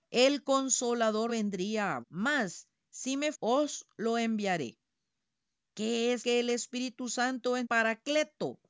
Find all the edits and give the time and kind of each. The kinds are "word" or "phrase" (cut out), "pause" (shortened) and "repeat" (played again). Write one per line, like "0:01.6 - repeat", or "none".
0:01.3 - word
0:02.0 - word
0:03.3 - word
0:06.2 - word
0:07.6 - word